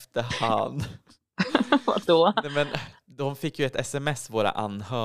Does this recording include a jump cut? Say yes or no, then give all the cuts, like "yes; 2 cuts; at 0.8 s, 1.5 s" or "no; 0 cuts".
no; 0 cuts